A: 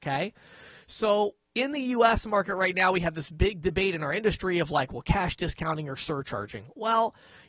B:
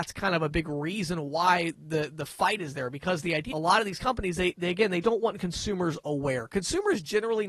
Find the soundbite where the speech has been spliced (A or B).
B